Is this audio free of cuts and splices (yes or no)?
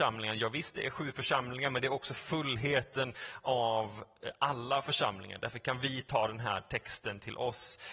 yes